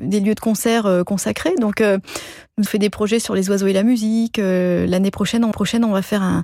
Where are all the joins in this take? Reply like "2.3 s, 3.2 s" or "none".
2.7 s, 5.5 s

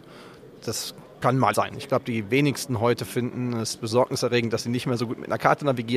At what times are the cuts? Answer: 1.5 s

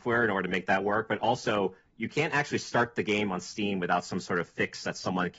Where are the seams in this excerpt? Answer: none

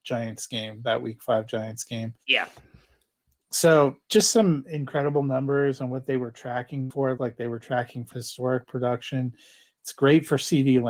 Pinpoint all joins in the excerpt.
4.0 s, 7.2 s, 8.1 s

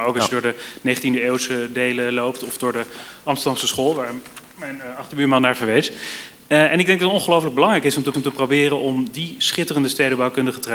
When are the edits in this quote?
8.1 s

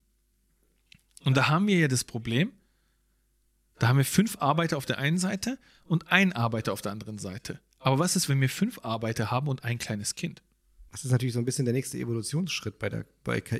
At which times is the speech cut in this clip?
none

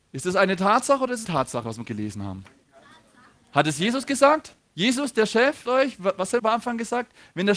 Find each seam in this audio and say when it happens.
1.2 s, 1.8 s, 4.6 s, 5.7 s, 6.4 s

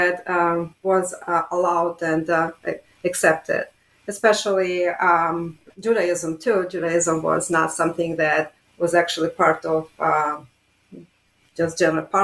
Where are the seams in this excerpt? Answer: 5.7 s, 8.6 s

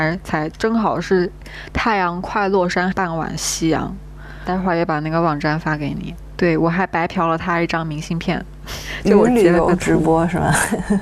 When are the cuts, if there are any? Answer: 2.9 s

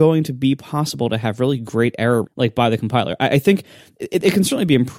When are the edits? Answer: 2.2 s

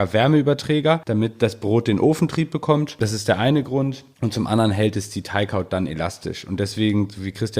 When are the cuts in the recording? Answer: none

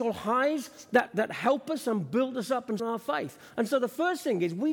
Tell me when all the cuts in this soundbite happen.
1.1 s, 2.8 s

